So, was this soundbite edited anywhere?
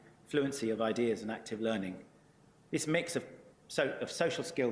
no; 0 cuts

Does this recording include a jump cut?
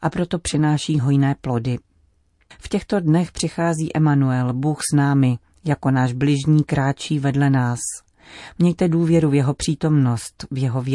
no; 0 cuts

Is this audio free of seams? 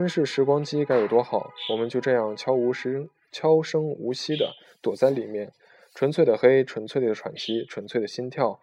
yes; 0 cuts

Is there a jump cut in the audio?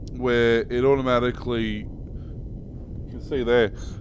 yes; 1 cut; at 3.1 s

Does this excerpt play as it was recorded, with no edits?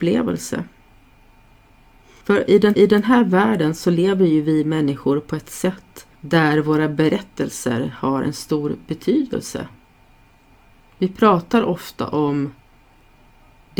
no; 1 cut; at 2.7 s

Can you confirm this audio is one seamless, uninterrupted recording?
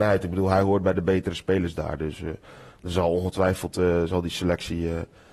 yes; 0 cuts

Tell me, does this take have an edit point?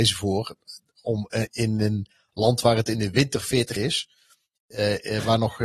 yes; 2 cuts; at 1.5 s, 3.8 s

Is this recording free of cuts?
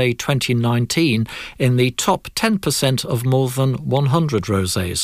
yes; 0 cuts

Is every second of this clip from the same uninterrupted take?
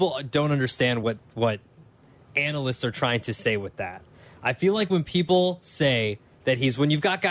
yes; 0 cuts

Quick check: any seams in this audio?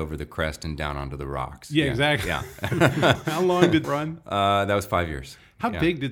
yes; 2 cuts; at 3.1 s, 3.8 s

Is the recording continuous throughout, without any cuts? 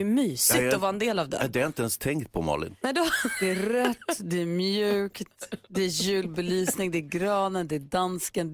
yes; 0 cuts

